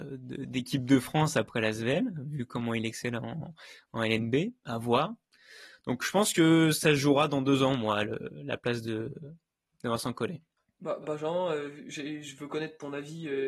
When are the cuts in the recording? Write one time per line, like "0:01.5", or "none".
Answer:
0:11.0